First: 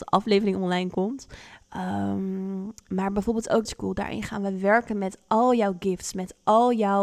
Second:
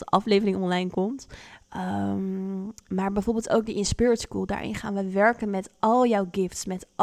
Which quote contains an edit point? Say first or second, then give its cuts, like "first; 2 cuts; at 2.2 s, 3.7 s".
first; 1 cut; at 3.7 s